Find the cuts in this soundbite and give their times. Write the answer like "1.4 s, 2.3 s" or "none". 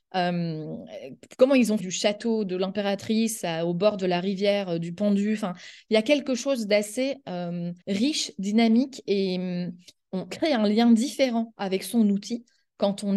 1.8 s, 7.8 s, 10.3 s